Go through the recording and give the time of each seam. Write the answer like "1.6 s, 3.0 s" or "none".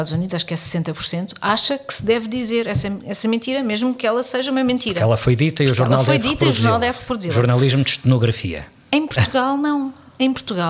none

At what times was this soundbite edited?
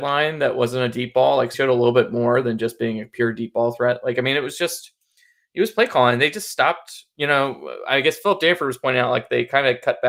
1.5 s

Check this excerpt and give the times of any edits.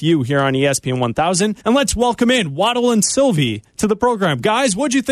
1.6 s

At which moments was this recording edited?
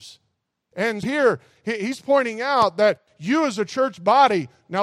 1.0 s

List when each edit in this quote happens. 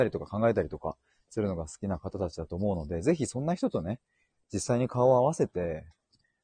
none

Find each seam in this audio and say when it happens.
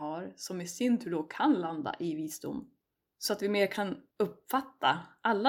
none

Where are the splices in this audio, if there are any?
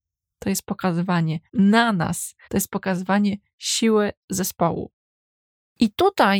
1.5 s, 2.4 s

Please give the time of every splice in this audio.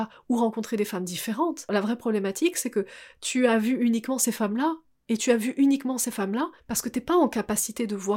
6.6 s

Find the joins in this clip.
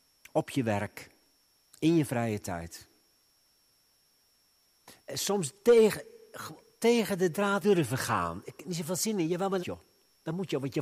5.0 s, 7.6 s, 9.6 s

